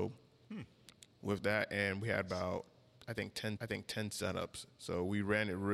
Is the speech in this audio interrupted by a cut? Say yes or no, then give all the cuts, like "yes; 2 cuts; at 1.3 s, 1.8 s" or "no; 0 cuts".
yes; 1 cut; at 3.6 s